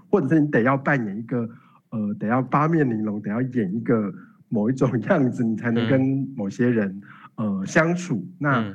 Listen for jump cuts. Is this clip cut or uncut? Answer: uncut